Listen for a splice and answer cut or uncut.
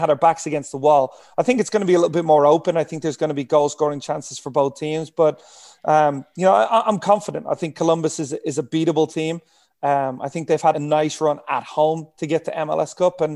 cut